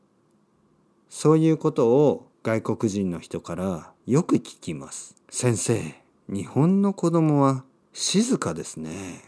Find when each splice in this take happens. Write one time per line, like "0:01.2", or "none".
0:02.3
0:05.2
0:07.8